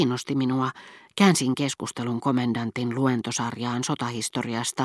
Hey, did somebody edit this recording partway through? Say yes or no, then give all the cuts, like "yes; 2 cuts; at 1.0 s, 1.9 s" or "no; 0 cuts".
no; 0 cuts